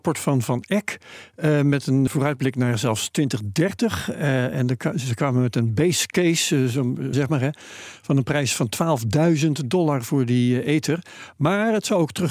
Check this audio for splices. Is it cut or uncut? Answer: cut